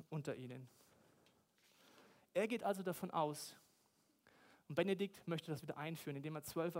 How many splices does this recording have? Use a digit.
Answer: 0